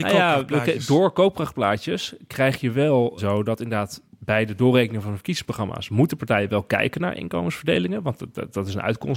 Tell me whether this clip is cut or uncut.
cut